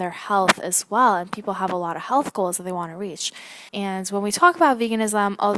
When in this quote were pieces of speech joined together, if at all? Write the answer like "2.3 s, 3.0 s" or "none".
3.7 s